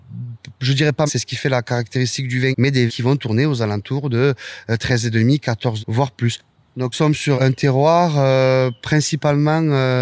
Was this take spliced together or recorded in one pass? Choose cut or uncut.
cut